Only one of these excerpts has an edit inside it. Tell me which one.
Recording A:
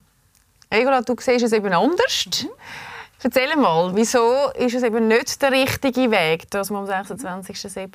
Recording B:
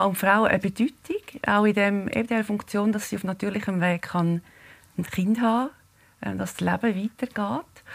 A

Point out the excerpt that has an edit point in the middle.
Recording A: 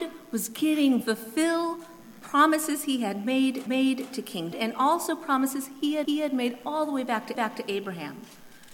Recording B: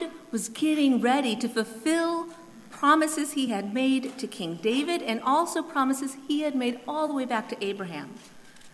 A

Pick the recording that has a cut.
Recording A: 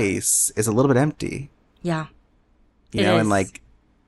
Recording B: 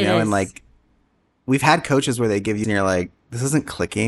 B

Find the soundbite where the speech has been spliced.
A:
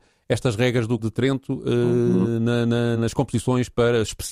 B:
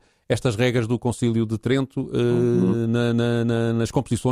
A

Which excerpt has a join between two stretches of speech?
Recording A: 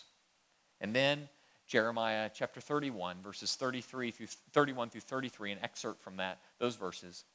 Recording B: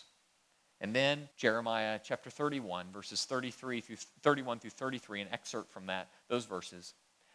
B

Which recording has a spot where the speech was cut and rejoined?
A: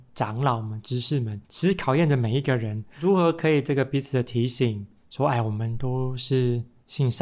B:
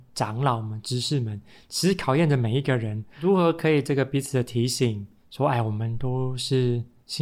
A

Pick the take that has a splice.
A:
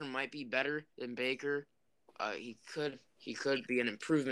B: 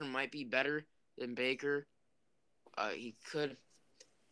A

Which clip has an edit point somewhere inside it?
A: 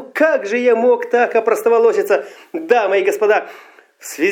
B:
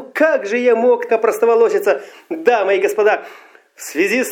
B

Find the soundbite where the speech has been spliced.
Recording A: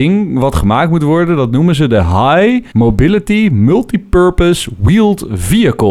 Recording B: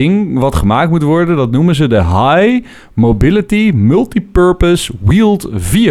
A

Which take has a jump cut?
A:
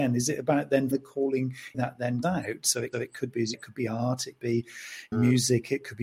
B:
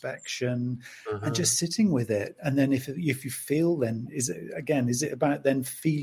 A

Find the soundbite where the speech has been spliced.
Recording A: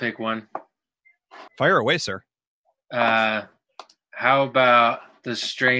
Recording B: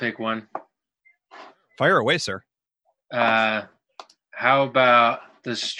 A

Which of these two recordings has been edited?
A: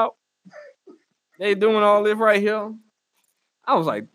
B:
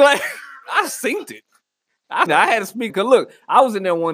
B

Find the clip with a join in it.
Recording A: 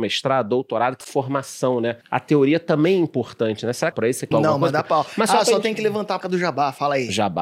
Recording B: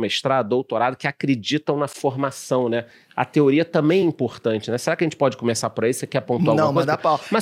A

